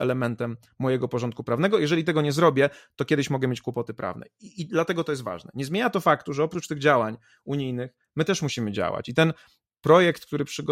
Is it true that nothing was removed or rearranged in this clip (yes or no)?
yes